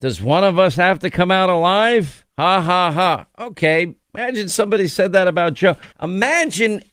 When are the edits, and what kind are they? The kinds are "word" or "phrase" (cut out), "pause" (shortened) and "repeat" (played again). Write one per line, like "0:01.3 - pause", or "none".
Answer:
0:02.3 - pause
0:04.0 - pause
0:05.9 - pause

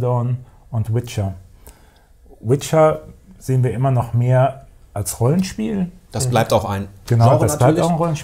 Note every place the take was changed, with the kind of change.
none

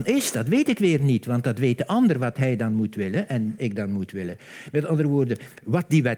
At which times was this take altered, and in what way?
0:03.6 - phrase

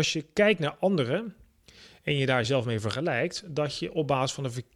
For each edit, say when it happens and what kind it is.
none

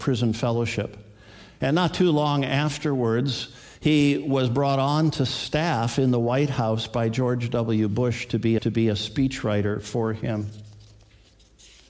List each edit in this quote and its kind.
0:08.6 - repeat

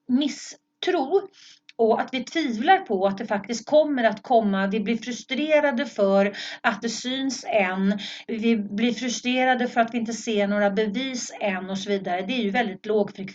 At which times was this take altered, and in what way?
0:06.8 - word

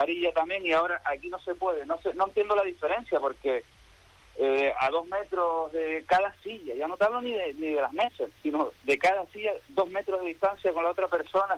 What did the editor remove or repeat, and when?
0:08.4 - pause

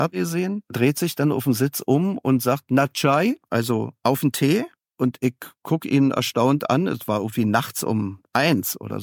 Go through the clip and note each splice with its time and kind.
none

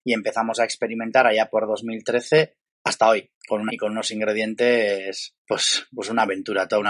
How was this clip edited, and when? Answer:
0:02.7 - pause
0:03.4 - pause
0:03.7 - word
0:05.4 - pause

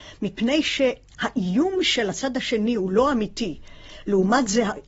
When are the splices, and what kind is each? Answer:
none

